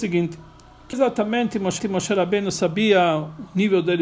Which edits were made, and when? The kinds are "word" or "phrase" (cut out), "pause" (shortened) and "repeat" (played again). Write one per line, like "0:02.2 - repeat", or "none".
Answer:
0:00.9 - phrase
0:01.8 - repeat

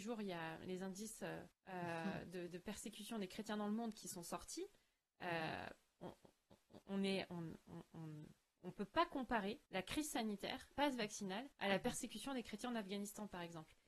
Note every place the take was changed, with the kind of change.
0:01.5 - pause
0:02.5 - word
0:06.8 - pause
0:09.7 - pause
0:10.7 - word
0:11.5 - pause

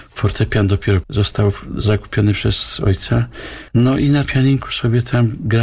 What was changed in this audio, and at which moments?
0:01.0 - word
0:03.7 - pause
0:04.2 - word

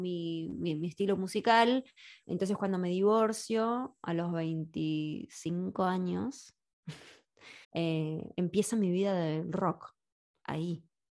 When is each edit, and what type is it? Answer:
0:07.6 - pause

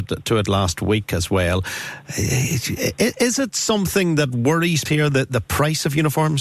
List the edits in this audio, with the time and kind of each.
0:04.9 - word

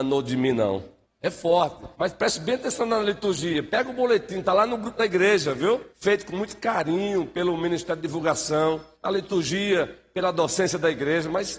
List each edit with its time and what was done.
0:01.0 - pause
0:01.9 - pause
0:05.9 - pause
0:08.9 - pause

